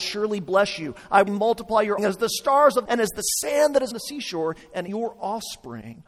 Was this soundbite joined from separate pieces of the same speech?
yes; 5 cuts; at 1.3 s, 2.0 s, 2.8 s, 3.9 s, 4.9 s

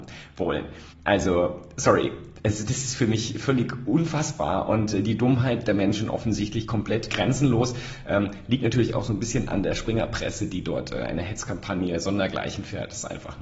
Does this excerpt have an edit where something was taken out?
yes; 1 cut; at 0.9 s

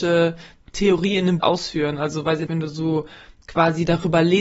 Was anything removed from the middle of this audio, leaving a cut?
yes; 2 cuts; at 1.4 s, 2.5 s

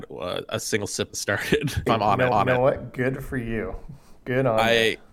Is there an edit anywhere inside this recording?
yes; 3 cuts; at 1.1 s, 1.9 s, 2.3 s

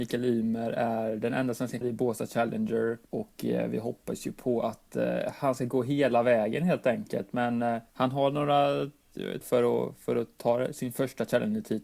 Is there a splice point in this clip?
yes; 4 cuts; at 1.8 s, 3.0 s, 7.9 s, 9.4 s

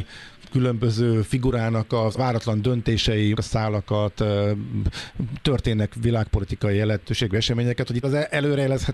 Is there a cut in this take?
yes; 3 cuts; at 2.2 s, 3.3 s, 8.0 s

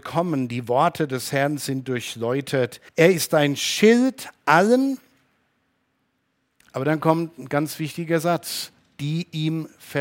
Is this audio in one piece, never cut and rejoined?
no; 2 cuts; at 2.9 s, 8.8 s

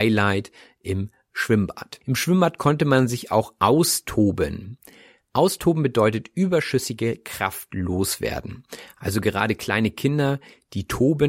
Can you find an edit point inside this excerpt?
no; 0 cuts

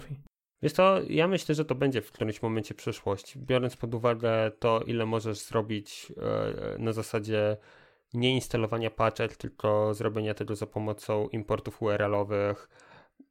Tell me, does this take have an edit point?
no; 0 cuts

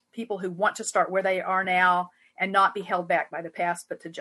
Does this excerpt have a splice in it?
no; 0 cuts

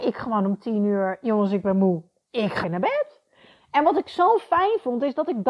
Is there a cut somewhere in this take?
yes; 1 cut; at 2.6 s

